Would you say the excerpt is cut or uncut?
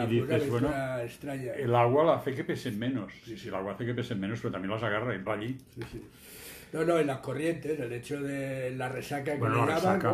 cut